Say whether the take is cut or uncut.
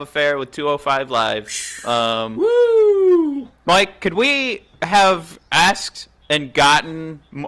uncut